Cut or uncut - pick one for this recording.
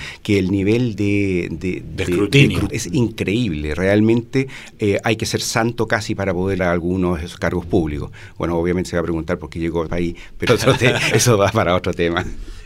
cut